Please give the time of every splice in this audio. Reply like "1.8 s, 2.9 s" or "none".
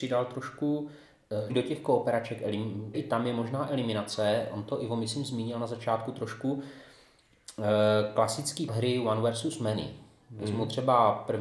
1.5 s, 2.9 s, 8.7 s